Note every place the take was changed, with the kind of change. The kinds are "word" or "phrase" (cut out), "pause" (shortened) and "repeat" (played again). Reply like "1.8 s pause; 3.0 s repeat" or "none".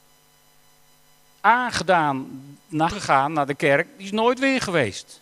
2.9 s word